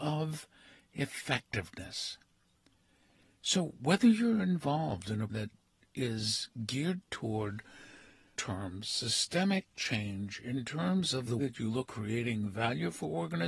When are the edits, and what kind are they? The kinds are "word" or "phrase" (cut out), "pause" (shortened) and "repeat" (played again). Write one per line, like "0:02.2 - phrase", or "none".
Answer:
0:05.3 - word
0:08.3 - word
0:11.4 - word
0:11.9 - word